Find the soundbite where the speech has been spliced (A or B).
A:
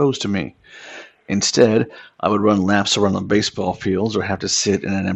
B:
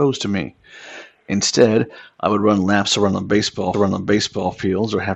B